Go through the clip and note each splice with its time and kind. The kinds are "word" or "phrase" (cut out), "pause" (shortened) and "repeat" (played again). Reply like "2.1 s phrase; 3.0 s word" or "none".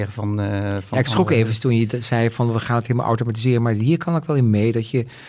none